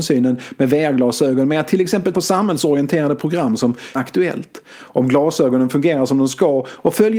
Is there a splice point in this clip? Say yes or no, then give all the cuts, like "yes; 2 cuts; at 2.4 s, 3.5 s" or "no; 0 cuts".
yes; 2 cuts; at 2.1 s, 4.0 s